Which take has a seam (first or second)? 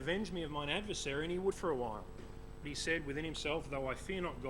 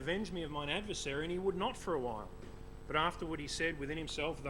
first